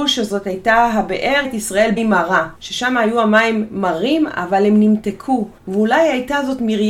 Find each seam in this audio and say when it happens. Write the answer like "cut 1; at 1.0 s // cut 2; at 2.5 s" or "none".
cut 1; at 1.4 s // cut 2; at 2.0 s // cut 3; at 2.6 s // cut 4; at 5.6 s

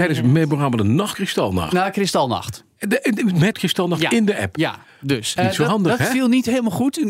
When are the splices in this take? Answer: cut 1; at 1.1 s // cut 2; at 3.5 s // cut 3; at 5.4 s

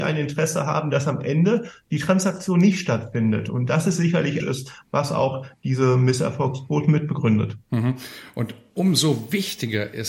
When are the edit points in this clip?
cut 1; at 4.4 s

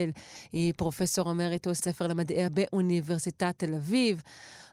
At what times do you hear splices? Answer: cut 1; at 1.8 s // cut 2; at 2.5 s

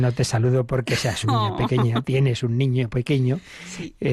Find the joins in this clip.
cut 1; at 1.2 s

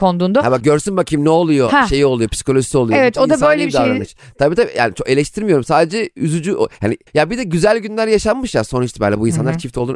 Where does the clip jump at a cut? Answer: cut 1; at 7.1 s

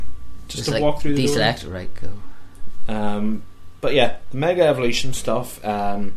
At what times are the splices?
none

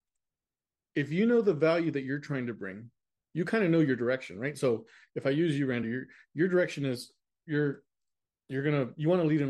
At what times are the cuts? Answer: none

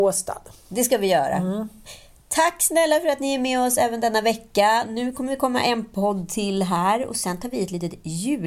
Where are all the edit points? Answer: none

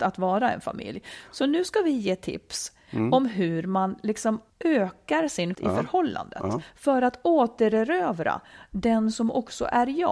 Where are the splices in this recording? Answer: cut 1; at 4.5 s // cut 2; at 5.5 s

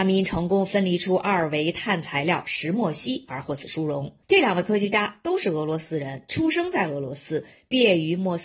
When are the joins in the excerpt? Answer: cut 1; at 4.2 s

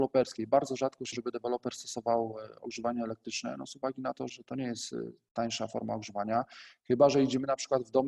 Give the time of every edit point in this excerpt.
cut 1; at 1.1 s // cut 2; at 4.3 s

